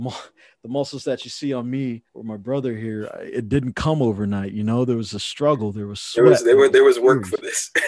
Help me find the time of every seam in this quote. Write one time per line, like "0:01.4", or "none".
0:02.1